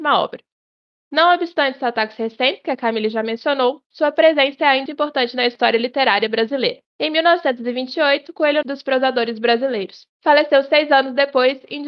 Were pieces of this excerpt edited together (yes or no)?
yes